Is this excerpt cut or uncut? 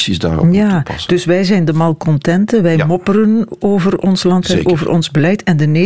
uncut